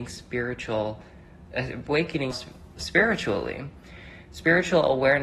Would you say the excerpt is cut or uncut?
cut